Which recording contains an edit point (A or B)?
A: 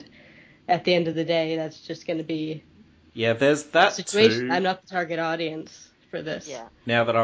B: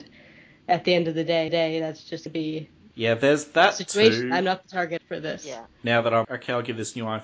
B